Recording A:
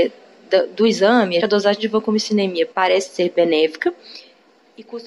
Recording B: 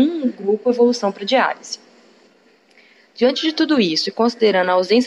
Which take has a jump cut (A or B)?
A